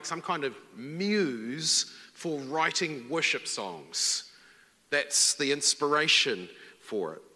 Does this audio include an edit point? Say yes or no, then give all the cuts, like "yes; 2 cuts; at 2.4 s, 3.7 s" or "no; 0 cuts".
no; 0 cuts